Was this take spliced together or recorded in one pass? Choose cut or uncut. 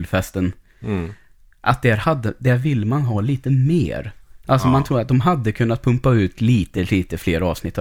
uncut